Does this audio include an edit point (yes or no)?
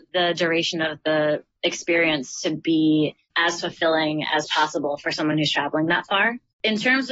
no